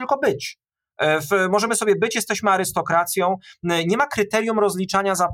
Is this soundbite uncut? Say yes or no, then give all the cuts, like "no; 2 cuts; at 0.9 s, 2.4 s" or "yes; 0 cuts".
yes; 0 cuts